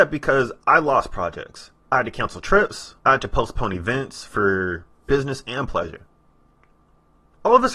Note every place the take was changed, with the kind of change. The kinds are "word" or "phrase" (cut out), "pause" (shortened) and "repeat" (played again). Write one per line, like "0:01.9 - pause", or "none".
0:01.8 - pause
0:03.0 - pause